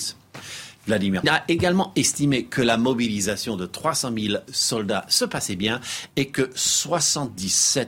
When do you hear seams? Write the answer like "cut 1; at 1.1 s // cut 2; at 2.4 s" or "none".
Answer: cut 1; at 1.2 s